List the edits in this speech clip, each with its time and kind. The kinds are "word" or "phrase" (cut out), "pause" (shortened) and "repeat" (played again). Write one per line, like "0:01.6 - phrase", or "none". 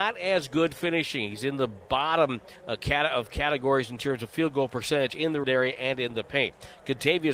0:02.6 - pause
0:05.4 - word